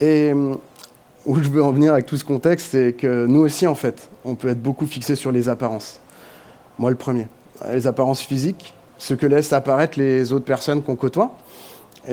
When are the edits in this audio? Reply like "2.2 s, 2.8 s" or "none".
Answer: none